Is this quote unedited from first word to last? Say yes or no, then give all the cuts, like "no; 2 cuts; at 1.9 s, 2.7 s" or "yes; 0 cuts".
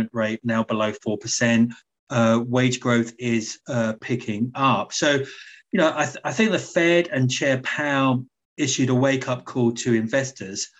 yes; 0 cuts